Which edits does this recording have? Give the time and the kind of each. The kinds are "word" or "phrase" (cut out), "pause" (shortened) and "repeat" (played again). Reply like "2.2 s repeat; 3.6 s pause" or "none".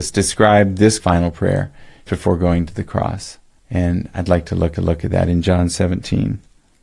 1.0 s phrase; 2.1 s word; 3.6 s pause; 4.8 s repeat